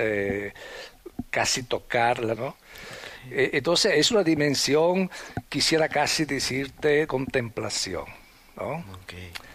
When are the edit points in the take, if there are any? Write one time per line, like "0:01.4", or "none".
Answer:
0:02.4
0:07.1